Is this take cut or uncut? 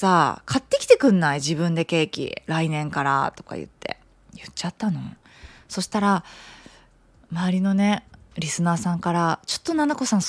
uncut